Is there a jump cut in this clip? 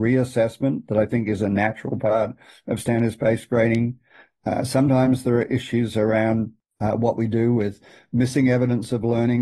no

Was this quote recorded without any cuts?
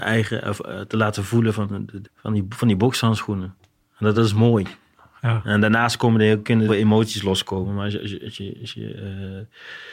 no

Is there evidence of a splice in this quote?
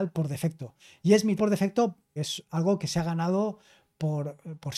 yes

